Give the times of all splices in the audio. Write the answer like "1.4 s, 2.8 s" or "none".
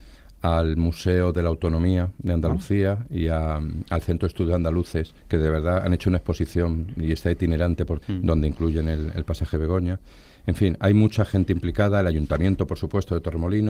5.2 s, 8.0 s